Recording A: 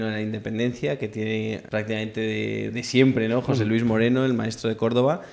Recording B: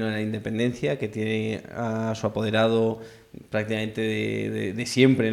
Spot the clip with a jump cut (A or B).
A